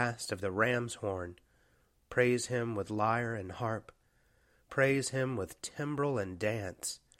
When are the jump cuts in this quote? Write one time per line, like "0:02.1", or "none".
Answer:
none